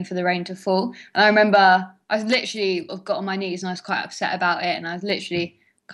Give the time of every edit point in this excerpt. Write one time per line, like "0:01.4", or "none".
0:02.9